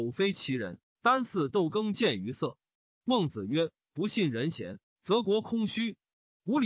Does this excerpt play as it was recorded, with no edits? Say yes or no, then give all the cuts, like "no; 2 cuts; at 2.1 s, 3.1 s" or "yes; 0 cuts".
yes; 0 cuts